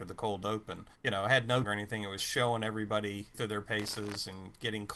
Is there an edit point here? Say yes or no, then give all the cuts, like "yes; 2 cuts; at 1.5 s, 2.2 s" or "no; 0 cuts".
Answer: yes; 4 cuts; at 1.0 s, 1.6 s, 2.2 s, 3.3 s